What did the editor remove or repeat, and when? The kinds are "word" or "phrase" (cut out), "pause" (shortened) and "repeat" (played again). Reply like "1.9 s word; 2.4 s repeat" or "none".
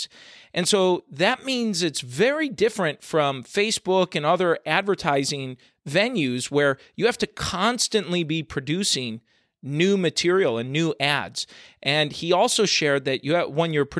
none